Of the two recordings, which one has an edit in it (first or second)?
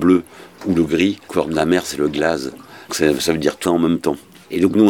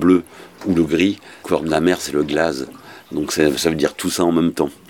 first